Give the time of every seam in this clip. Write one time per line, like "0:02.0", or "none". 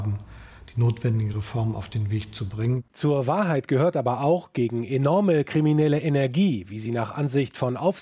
none